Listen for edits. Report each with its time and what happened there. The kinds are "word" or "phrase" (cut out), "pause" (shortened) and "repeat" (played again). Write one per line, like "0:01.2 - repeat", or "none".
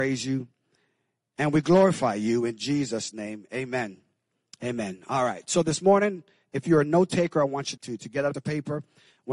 0:07.8 - word
0:08.3 - word

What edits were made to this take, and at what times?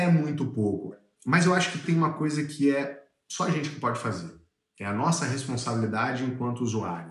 none

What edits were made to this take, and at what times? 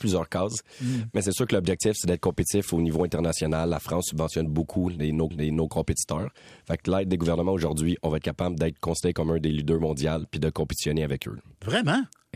0:05.3 - repeat
0:06.8 - phrase

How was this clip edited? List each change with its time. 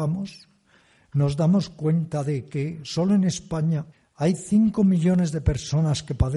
0:03.9 - pause

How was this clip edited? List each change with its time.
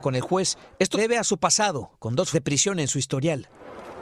0:00.9 - word
0:02.3 - word

